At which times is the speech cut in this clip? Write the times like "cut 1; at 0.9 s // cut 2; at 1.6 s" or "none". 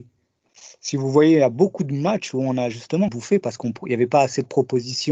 cut 1; at 3.1 s